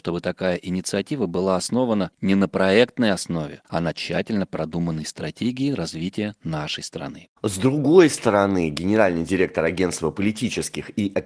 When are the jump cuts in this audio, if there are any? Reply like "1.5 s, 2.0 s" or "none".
7.4 s